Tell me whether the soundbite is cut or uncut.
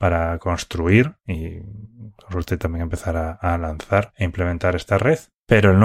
uncut